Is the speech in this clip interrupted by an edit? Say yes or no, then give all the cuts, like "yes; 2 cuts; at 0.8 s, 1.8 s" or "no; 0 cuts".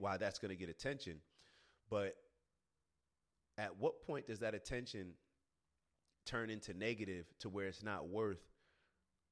no; 0 cuts